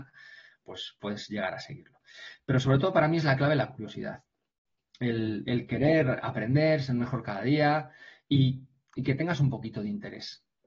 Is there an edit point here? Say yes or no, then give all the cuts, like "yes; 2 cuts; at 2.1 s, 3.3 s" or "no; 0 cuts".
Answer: no; 0 cuts